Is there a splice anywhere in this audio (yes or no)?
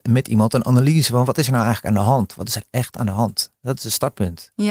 no